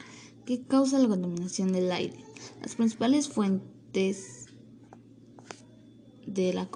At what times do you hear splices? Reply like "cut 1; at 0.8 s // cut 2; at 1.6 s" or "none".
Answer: none